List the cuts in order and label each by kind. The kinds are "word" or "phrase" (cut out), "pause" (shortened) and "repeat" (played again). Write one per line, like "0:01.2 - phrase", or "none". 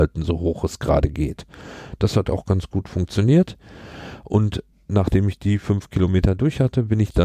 0:04.7 - pause

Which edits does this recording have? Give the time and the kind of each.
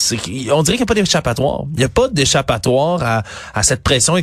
none

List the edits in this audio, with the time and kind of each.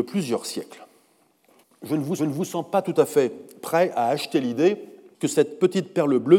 0:02.2 - repeat

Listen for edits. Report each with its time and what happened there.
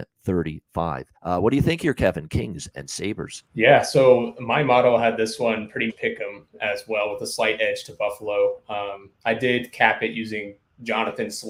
0:01.2 - pause
0:03.5 - pause
0:05.9 - word

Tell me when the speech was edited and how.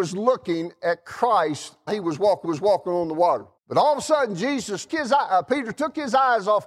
0:01.9 - word
0:02.4 - repeat
0:03.6 - pause
0:04.9 - word

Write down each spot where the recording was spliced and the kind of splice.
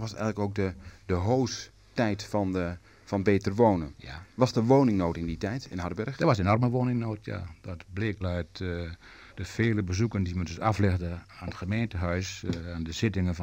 0:04.3 - pause
0:08.2 - phrase
0:09.3 - pause

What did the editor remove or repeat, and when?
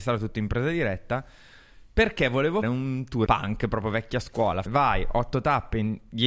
0:02.6 - word
0:03.3 - word
0:04.7 - word

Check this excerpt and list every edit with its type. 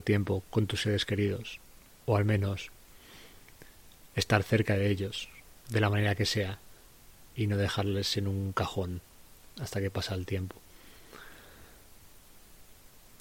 none

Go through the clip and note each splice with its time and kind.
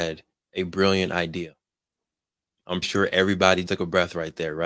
0:02.8 - word
0:03.7 - word

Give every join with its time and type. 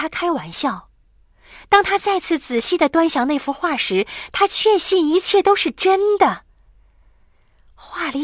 none

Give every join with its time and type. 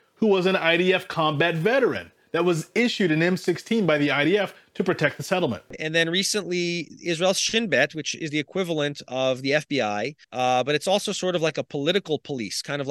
0:10.2 - pause

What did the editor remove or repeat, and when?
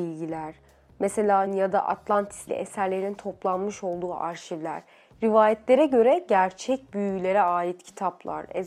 0:01.5 - phrase
0:02.5 - word

